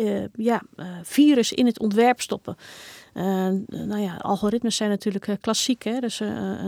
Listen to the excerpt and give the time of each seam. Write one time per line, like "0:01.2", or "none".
none